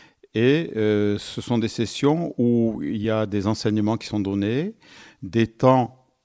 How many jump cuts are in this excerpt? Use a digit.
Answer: 0